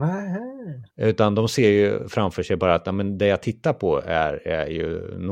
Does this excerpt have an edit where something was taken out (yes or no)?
yes